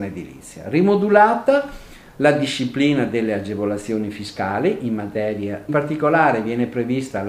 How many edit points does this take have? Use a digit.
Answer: 1